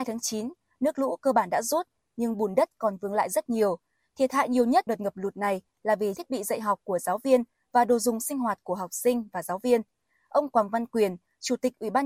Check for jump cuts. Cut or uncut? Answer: cut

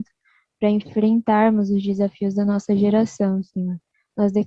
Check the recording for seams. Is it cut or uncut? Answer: uncut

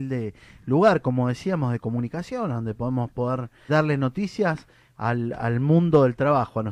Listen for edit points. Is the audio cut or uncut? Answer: cut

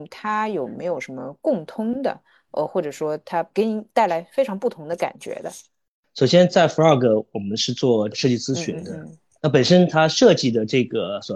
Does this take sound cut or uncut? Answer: uncut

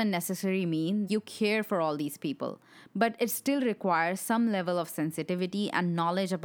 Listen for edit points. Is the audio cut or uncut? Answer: cut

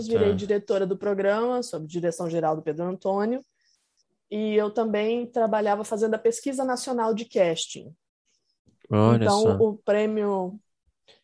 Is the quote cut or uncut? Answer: uncut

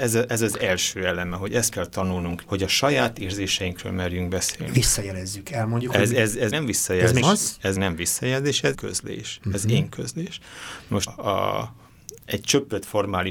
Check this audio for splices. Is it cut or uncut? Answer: cut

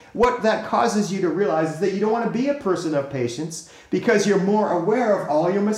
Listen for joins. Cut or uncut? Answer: uncut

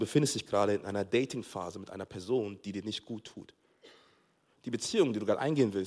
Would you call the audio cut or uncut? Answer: uncut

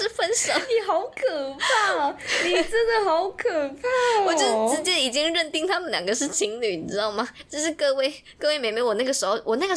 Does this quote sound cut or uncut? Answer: cut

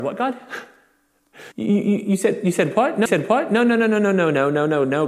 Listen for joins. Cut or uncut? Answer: cut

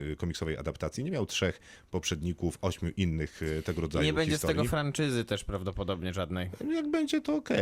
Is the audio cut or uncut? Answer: uncut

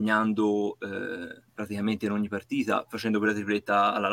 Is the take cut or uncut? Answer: cut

